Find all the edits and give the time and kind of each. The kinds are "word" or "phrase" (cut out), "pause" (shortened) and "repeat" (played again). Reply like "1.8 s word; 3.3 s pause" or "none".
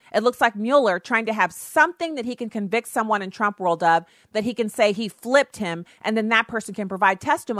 none